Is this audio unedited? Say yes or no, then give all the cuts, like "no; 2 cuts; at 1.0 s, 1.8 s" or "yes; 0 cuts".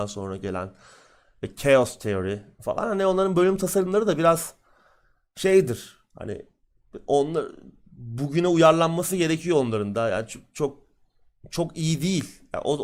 yes; 0 cuts